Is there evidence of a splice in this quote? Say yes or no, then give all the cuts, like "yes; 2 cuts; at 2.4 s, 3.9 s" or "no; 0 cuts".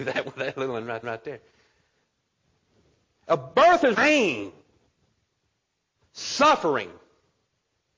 yes; 2 cuts; at 1.0 s, 3.9 s